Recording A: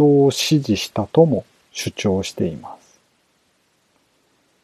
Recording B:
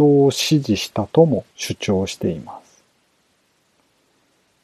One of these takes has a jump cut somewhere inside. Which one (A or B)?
B